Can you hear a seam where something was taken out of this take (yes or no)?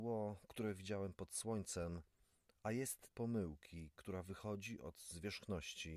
yes